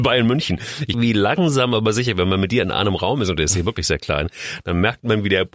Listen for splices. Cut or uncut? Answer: cut